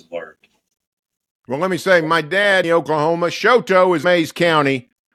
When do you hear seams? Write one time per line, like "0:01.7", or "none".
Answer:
0:02.6
0:04.0